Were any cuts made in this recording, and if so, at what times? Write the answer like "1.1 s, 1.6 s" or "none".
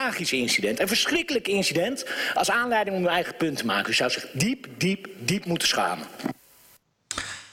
none